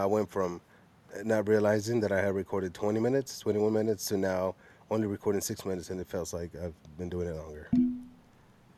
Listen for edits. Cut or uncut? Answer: uncut